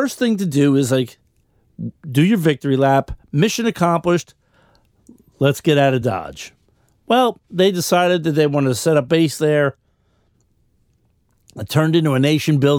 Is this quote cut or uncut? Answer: uncut